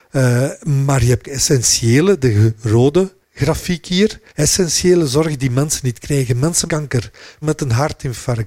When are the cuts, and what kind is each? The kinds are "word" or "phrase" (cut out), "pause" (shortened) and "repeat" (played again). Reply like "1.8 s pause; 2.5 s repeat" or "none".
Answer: 1.2 s word; 3.2 s pause; 4.3 s pause; 6.7 s word; 7.4 s word